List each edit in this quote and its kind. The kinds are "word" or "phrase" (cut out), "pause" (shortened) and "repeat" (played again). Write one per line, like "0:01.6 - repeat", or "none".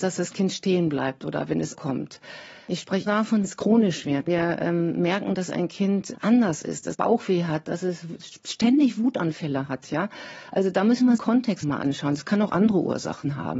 0:01.7 - word
0:03.1 - word
0:03.4 - word
0:04.3 - word
0:06.1 - word
0:06.9 - word
0:11.2 - word
0:11.6 - word